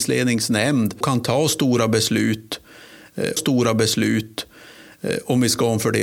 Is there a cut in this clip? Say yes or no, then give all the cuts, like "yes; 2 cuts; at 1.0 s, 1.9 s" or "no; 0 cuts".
yes; 2 cuts; at 1.0 s, 3.4 s